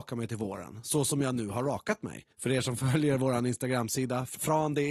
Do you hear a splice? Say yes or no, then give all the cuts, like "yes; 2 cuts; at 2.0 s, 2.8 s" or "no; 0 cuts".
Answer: yes; 1 cut; at 2.3 s